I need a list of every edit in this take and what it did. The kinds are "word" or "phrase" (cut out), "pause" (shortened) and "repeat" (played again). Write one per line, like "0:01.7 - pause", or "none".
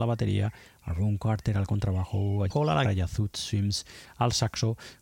0:02.5 - word
0:02.8 - word

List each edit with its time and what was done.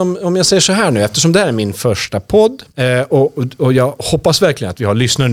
0:02.7 - pause

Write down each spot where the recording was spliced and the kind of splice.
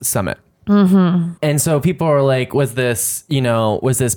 0:01.4 - pause

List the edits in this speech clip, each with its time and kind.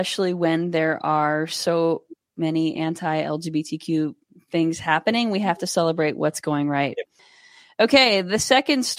none

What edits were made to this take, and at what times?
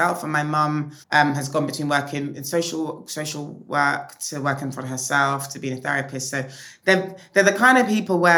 0:01.0 - pause

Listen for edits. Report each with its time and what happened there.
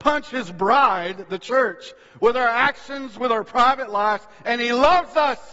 none

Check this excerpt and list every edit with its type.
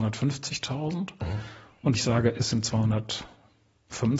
0:01.9 - word

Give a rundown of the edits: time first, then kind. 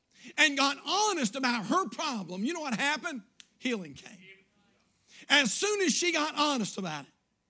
none

